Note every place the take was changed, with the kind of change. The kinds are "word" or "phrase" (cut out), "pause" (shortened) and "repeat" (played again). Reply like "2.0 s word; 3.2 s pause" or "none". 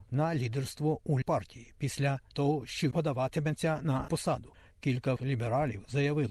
1.2 s word; 2.3 s word; 2.9 s word; 4.1 s word; 5.2 s word